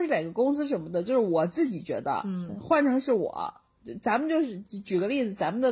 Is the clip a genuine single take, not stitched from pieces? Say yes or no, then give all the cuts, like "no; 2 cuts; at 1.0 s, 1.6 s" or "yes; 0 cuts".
yes; 0 cuts